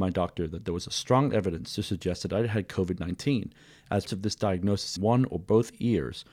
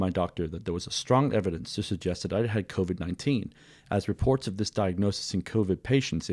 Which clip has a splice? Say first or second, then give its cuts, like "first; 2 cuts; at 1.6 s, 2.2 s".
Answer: first; 2 cuts; at 4.1 s, 5.0 s